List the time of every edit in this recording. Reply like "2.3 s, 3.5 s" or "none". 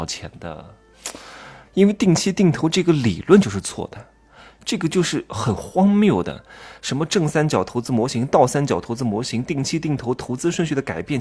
1.6 s